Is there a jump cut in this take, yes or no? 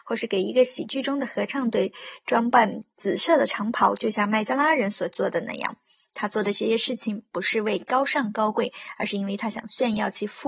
no